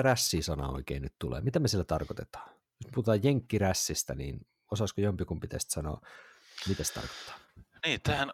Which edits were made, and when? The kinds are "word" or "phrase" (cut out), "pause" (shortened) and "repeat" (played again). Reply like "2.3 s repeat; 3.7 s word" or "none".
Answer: none